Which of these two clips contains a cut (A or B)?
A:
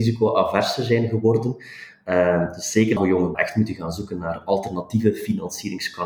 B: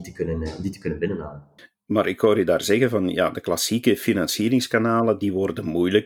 A